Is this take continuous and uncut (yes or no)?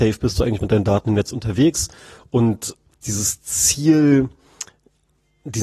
no